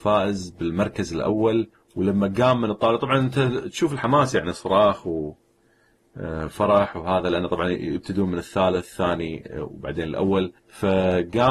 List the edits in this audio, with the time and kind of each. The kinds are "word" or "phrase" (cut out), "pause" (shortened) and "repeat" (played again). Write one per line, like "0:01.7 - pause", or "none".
0:01.7 - pause
0:10.6 - pause